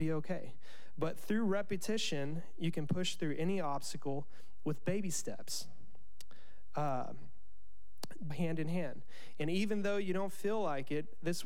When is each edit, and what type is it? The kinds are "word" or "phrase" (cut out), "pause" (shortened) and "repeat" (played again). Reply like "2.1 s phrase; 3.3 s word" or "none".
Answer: 8.3 s phrase